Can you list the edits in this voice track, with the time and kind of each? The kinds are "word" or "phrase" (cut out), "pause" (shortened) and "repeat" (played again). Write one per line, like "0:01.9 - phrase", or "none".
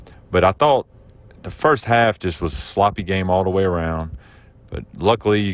none